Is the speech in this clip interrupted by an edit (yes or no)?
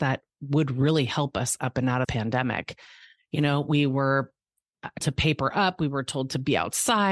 yes